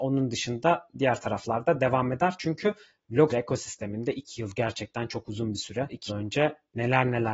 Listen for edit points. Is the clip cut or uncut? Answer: cut